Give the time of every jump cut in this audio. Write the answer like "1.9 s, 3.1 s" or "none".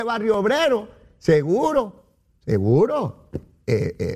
none

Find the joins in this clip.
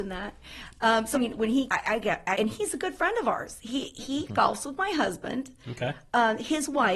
1.1 s, 1.7 s, 2.3 s

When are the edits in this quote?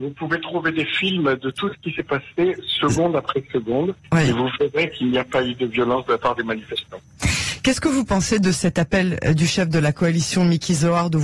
none

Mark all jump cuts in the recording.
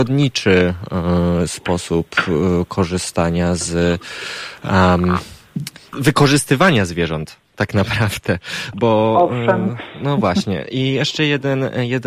5.9 s, 8.7 s

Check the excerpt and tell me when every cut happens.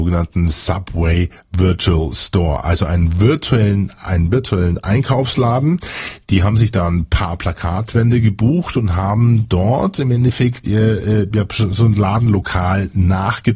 10.6 s

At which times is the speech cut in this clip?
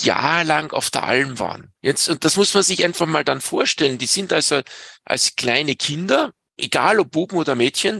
1.8 s

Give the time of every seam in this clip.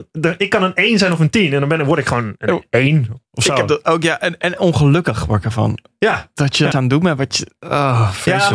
6.7 s

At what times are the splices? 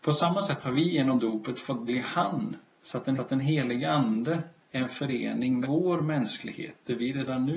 1.9 s, 3.2 s, 4.6 s, 5.6 s

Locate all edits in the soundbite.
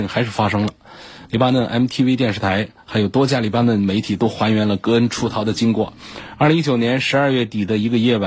none

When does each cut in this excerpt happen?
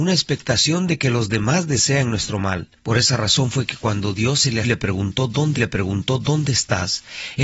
2.8 s, 4.6 s, 5.6 s

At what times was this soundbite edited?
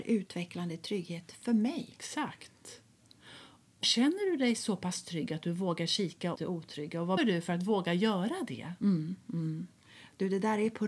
3.8 s, 6.3 s, 7.2 s

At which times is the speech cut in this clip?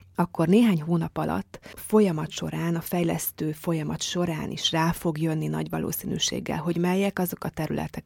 1.8 s

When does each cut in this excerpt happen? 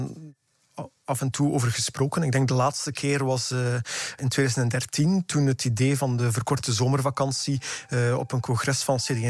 none

